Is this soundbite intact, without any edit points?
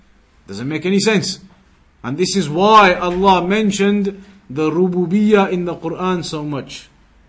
yes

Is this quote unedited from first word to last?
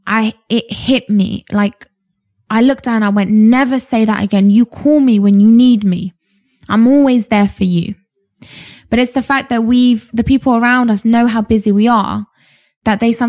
yes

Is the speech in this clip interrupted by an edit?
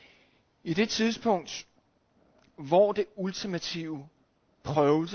no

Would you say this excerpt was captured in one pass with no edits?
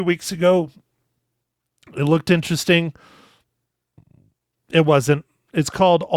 yes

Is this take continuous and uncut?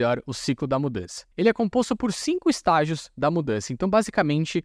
no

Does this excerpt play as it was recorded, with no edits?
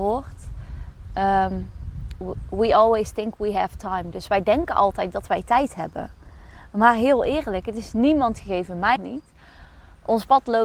no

